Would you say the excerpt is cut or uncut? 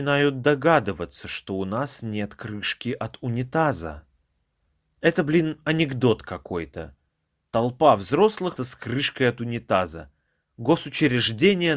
cut